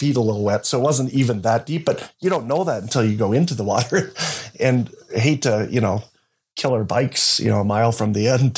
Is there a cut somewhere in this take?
no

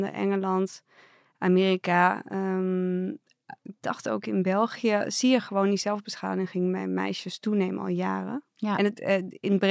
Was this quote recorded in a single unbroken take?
yes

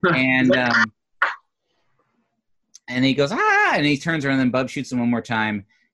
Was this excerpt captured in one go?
yes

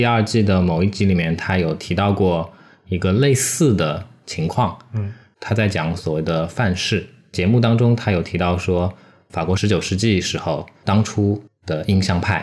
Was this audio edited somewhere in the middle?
no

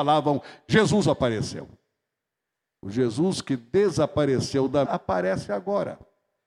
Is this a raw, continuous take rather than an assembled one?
no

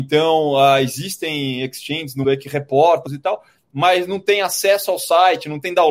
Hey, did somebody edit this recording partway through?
yes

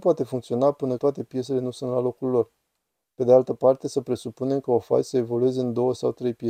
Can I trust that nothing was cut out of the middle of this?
no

